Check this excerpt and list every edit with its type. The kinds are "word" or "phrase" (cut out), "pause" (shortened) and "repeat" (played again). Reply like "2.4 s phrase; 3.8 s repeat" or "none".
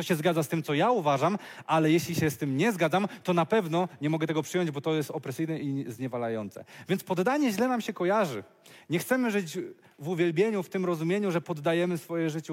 none